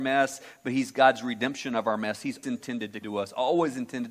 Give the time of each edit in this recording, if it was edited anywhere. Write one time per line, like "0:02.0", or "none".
0:02.4
0:03.0